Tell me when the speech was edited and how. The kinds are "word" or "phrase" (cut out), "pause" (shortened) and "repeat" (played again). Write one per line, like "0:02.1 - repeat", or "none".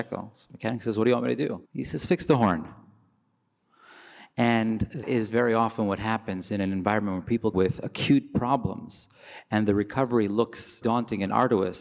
0:01.7 - pause
0:05.0 - word
0:07.5 - word
0:10.8 - word